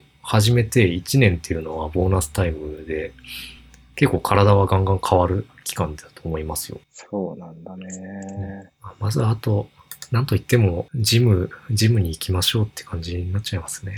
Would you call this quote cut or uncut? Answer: uncut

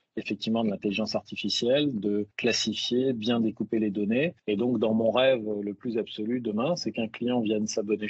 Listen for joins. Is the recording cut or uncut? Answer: cut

